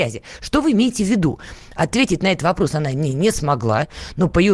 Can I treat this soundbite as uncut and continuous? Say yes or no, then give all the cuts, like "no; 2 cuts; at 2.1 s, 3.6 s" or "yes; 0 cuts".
yes; 0 cuts